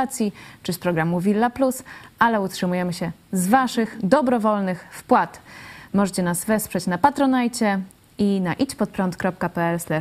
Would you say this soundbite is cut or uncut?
uncut